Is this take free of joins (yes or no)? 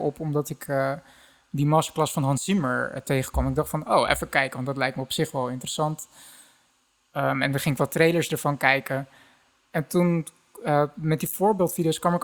yes